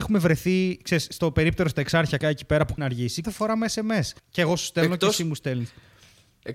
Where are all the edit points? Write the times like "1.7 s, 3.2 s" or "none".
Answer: 2.2 s, 2.8 s, 3.2 s, 4.2 s